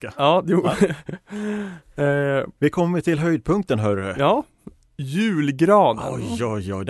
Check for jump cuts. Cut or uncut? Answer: uncut